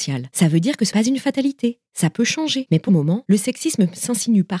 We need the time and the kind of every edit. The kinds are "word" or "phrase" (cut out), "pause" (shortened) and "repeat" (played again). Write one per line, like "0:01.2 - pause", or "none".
0:00.9 - word
0:02.9 - word